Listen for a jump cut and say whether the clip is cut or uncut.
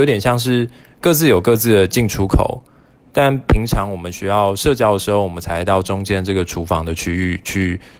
uncut